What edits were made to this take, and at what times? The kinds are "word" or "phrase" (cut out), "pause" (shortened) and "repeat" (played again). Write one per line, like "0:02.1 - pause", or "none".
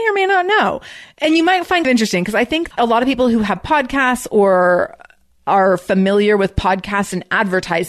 0:01.8 - word
0:02.7 - word